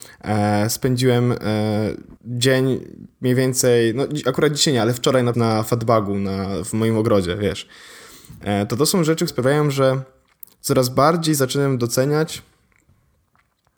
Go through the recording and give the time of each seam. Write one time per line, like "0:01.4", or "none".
0:02.2
0:05.3
0:09.3